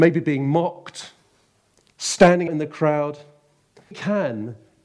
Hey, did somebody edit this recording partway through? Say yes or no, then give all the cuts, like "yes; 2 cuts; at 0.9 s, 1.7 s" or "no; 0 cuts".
yes; 2 cuts; at 2.5 s, 3.9 s